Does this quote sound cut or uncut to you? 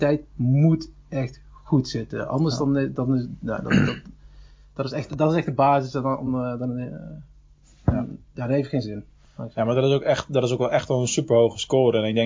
uncut